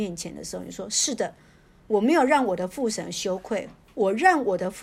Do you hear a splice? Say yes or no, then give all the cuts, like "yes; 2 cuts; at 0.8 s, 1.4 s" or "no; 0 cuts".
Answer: no; 0 cuts